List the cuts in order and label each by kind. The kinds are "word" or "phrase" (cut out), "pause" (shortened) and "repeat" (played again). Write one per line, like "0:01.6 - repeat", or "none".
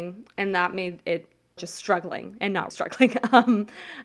0:01.6 - phrase
0:02.7 - word